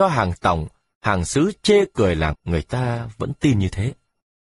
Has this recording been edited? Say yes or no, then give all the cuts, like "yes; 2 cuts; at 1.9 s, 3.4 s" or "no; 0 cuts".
yes; 1 cut; at 2.3 s